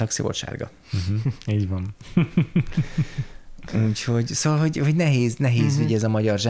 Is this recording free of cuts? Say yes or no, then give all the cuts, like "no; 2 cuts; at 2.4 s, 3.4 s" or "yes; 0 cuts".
yes; 0 cuts